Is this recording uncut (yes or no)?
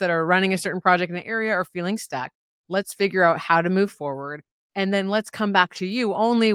yes